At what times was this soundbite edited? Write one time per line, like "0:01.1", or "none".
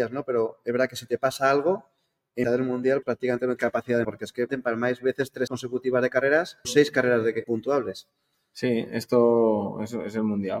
0:02.4
0:03.0
0:03.6
0:04.0
0:04.5
0:05.5
0:06.6
0:07.4